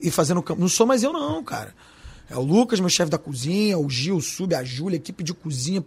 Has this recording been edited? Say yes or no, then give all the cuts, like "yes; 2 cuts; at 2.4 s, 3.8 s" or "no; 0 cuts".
no; 0 cuts